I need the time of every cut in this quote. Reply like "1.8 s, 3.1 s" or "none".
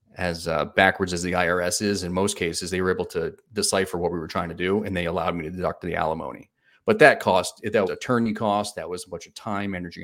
7.9 s